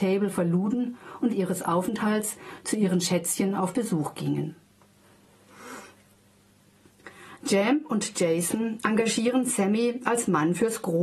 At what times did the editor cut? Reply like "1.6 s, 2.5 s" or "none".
1.3 s

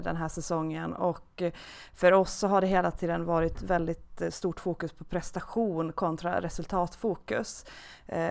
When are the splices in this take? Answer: none

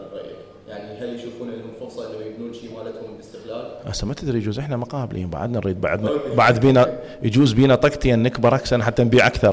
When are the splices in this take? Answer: none

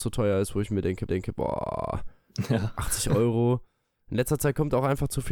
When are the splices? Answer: 1.1 s

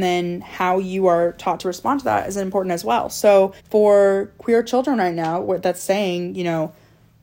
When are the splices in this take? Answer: 3.6 s

